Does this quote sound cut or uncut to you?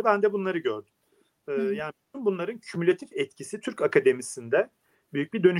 uncut